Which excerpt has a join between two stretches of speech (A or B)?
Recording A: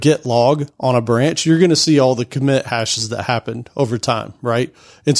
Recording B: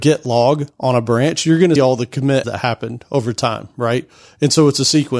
B